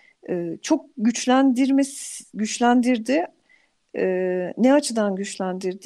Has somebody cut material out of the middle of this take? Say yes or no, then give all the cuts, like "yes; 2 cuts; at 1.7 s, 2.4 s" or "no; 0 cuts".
no; 0 cuts